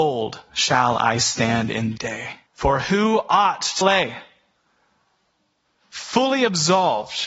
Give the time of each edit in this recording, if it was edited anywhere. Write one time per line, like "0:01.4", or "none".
0:02.0
0:02.5
0:03.8